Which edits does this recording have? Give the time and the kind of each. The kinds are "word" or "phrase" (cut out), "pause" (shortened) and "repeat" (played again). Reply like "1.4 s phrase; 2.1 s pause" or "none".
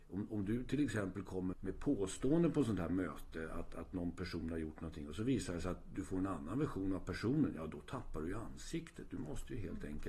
1.5 s word